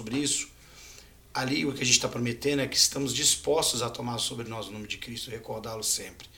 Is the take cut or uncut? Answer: uncut